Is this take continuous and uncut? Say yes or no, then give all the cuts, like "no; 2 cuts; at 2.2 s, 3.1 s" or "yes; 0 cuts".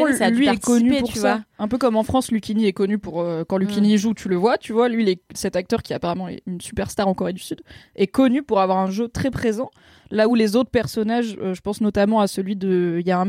yes; 0 cuts